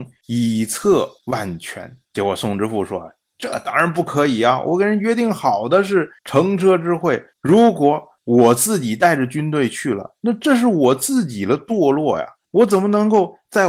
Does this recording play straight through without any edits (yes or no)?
no